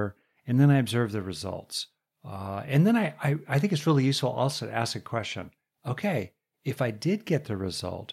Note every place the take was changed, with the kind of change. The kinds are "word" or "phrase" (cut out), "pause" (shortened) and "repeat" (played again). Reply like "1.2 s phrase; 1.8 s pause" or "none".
none